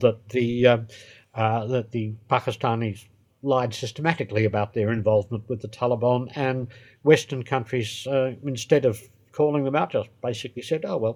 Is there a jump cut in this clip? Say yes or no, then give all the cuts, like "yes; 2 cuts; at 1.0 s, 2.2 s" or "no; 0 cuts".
no; 0 cuts